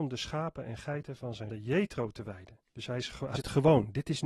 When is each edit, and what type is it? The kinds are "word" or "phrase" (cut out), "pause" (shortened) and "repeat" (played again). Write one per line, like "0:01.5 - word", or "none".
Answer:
0:01.5 - word
0:02.6 - pause
0:03.4 - word

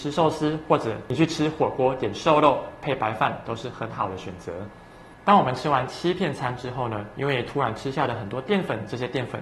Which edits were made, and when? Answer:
0:05.2 - pause

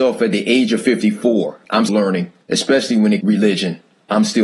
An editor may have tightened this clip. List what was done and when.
0:01.9 - word
0:02.4 - pause
0:03.2 - phrase

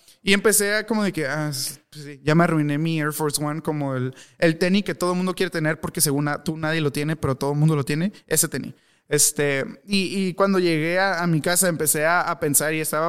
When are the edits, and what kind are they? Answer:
none

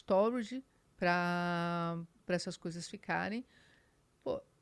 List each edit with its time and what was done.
none

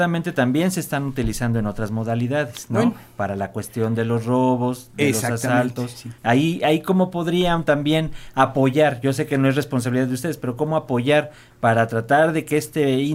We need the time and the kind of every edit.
0:06.2 - pause

